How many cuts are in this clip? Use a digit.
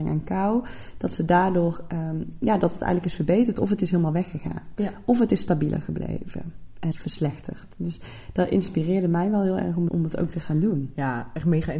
2